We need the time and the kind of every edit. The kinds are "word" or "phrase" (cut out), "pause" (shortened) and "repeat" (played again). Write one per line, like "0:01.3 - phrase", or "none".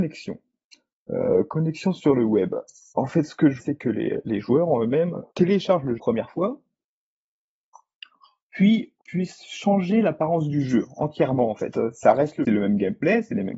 0:02.9 - pause
0:03.6 - word
0:05.3 - pause
0:06.0 - phrase
0:09.0 - pause
0:12.4 - phrase